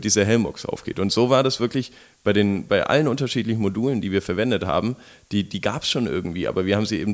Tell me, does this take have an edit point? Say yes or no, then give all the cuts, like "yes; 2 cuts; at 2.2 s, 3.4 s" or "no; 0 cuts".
no; 0 cuts